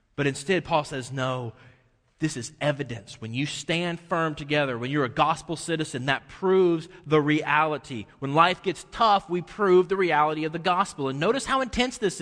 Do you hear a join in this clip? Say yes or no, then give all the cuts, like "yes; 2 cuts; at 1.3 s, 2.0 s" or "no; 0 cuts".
no; 0 cuts